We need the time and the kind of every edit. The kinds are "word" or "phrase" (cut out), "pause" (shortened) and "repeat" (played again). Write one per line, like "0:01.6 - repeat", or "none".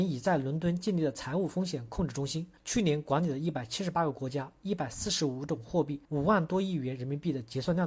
0:02.6 - pause
0:06.0 - pause